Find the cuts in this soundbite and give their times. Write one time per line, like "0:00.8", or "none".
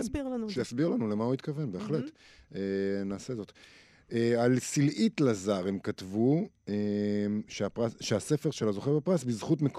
none